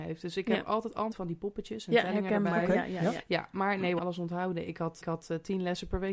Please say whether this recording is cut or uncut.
cut